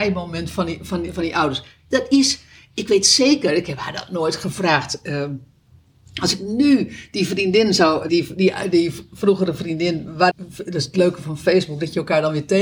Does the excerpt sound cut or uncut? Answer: cut